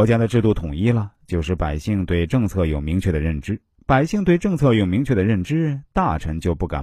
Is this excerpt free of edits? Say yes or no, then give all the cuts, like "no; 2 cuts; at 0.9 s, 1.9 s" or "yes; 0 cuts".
no; 1 cut; at 3.7 s